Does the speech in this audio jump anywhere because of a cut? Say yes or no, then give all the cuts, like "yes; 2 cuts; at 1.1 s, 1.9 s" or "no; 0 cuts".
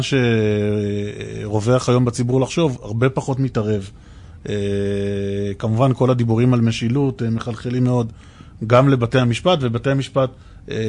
no; 0 cuts